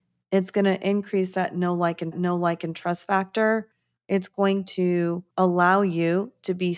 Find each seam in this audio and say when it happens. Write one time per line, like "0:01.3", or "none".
0:02.1
0:05.3